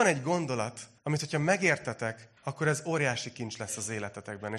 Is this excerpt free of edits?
no; 2 cuts; at 1.0 s, 2.4 s

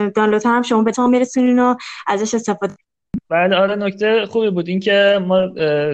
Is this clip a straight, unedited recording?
no; 2 cuts; at 0.9 s, 3.2 s

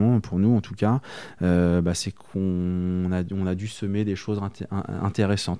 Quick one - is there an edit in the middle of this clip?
no; 0 cuts

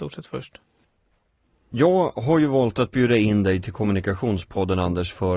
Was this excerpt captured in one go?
yes; 0 cuts

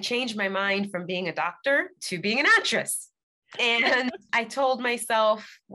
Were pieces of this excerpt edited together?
no; 0 cuts

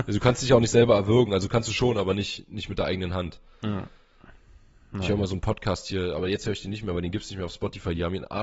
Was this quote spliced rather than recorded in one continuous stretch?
no; 0 cuts

